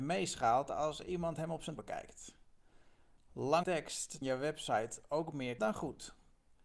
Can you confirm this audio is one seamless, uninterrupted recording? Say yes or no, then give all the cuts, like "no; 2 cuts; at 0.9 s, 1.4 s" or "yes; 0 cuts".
no; 4 cuts; at 1.8 s, 3.6 s, 4.2 s, 5.6 s